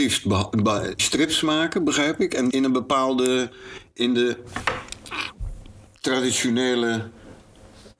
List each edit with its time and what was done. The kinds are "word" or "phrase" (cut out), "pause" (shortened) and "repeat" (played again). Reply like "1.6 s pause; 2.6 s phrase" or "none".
1.0 s word; 2.5 s word